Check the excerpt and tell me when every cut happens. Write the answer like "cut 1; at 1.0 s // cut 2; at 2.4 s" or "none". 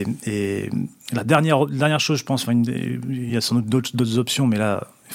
none